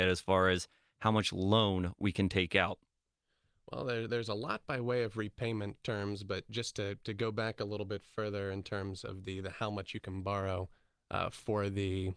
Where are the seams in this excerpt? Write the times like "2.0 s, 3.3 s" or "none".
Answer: none